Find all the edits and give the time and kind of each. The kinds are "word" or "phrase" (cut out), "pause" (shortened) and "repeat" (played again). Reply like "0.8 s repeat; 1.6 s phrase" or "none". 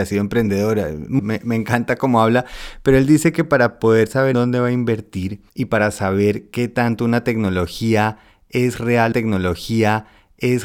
1.2 s word; 4.3 s word; 5.5 s pause; 9.1 s repeat